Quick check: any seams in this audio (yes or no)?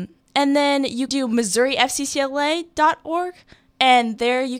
yes